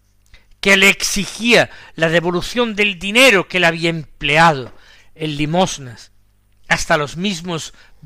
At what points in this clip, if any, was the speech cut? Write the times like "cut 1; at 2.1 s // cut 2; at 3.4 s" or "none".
none